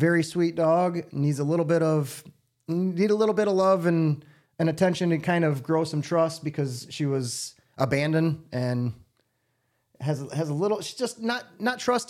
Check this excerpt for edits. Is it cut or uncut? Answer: uncut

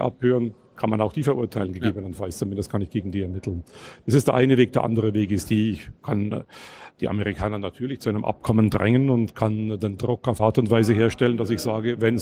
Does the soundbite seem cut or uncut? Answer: cut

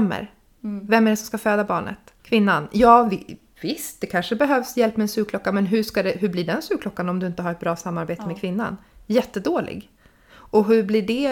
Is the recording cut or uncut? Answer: cut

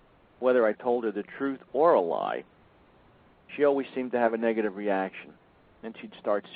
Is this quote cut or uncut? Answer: uncut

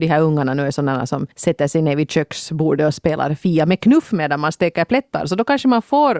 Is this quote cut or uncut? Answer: cut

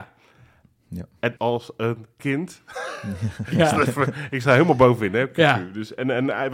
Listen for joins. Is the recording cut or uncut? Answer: cut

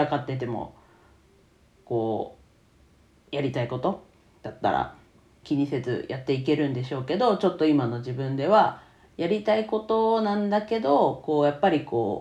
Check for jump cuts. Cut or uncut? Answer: cut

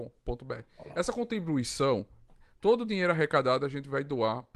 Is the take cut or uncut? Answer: uncut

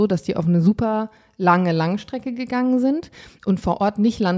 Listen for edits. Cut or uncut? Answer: uncut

